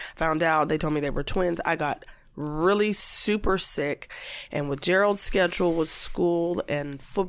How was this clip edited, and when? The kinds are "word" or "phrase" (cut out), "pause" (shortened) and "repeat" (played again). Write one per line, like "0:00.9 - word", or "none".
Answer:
none